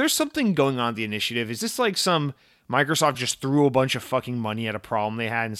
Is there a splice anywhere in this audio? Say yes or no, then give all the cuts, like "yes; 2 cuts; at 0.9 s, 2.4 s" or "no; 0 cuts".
no; 0 cuts